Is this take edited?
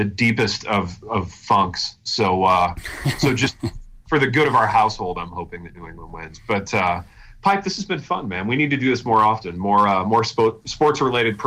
no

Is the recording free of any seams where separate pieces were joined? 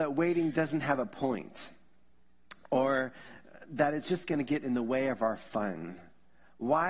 yes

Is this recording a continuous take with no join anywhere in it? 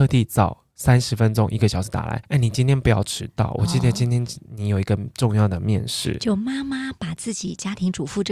no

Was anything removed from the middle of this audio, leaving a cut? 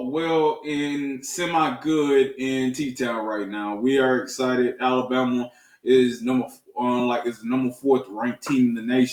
no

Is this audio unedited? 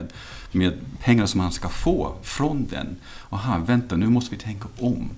yes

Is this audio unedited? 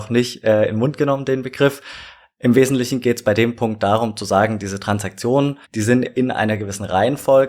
no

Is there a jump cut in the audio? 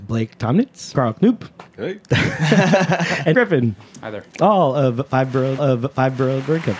yes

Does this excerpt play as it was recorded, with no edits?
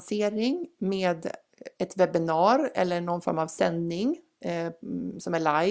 yes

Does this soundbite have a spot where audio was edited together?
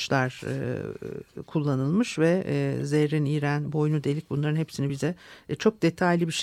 no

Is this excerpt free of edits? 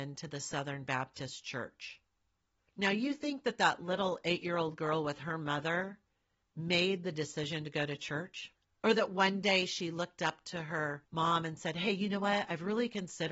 yes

